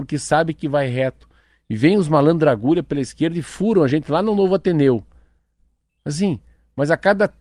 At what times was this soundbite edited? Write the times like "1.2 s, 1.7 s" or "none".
none